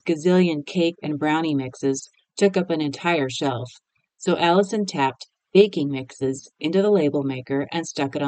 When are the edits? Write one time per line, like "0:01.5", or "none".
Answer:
none